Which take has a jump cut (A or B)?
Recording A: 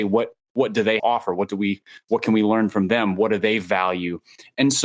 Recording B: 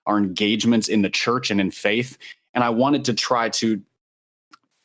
A